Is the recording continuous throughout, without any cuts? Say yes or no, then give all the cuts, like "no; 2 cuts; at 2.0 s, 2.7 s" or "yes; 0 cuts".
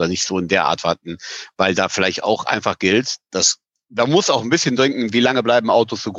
yes; 0 cuts